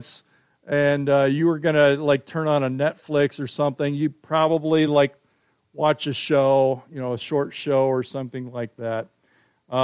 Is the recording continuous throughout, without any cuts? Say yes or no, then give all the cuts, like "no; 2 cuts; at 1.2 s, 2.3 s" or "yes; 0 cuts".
yes; 0 cuts